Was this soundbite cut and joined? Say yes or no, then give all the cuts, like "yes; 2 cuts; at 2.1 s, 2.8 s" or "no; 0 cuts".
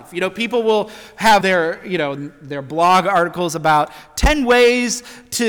yes; 2 cuts; at 1.4 s, 2.2 s